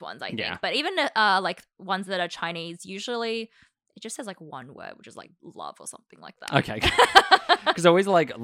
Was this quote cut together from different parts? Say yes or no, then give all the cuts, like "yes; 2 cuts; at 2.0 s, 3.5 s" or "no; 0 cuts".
no; 0 cuts